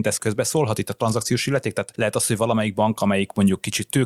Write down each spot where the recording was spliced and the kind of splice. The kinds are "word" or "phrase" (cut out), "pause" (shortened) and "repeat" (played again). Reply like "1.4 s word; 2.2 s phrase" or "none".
none